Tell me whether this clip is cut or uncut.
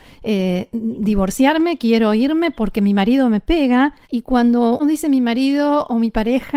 cut